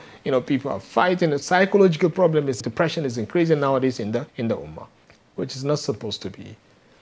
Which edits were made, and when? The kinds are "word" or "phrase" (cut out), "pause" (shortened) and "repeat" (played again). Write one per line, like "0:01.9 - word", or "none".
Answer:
0:01.4 - phrase
0:02.6 - word
0:04.3 - pause
0:05.0 - pause